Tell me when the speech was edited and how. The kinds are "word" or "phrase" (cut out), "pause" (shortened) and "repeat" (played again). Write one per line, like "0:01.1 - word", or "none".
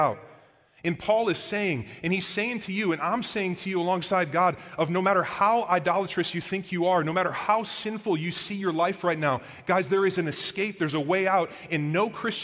none